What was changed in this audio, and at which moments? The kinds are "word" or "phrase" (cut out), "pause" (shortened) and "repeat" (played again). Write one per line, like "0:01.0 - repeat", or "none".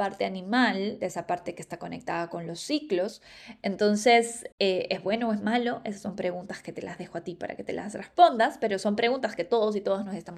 0:04.5 - pause